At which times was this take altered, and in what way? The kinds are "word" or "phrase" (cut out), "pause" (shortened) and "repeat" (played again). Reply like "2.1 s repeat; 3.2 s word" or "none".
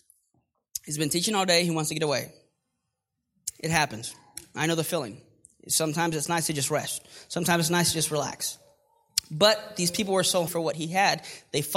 10.5 s word